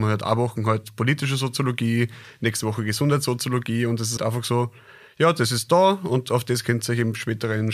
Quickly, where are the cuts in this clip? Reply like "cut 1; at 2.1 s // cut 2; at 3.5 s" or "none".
cut 1; at 4.2 s